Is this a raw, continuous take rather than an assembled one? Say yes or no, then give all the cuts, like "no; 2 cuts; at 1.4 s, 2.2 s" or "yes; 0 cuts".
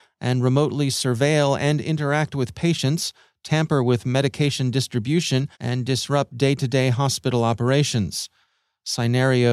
no; 1 cut; at 5.5 s